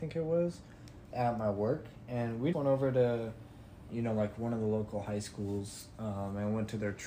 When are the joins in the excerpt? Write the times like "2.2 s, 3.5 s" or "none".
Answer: 1.1 s, 2.5 s, 3.9 s